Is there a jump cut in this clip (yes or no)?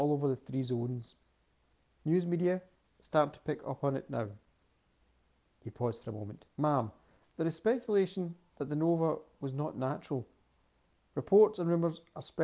yes